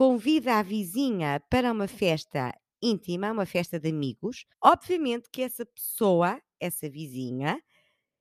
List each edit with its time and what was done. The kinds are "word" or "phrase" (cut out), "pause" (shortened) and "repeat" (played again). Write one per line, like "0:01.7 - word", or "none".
0:04.5 - pause